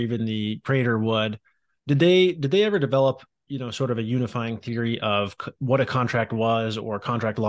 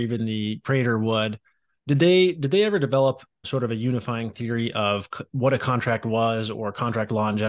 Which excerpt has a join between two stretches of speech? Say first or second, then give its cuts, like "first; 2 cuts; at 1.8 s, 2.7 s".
second; 1 cut; at 3.4 s